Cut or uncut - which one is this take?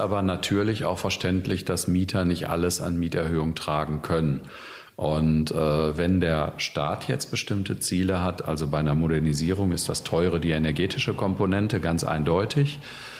uncut